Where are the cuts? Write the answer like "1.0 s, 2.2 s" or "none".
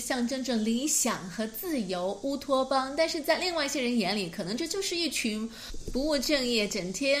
none